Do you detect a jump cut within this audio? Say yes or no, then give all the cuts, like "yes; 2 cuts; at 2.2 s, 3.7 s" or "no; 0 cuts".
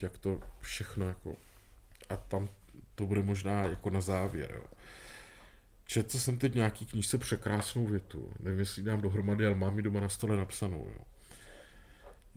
no; 0 cuts